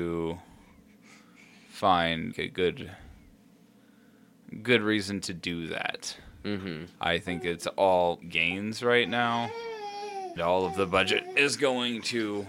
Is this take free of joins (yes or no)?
no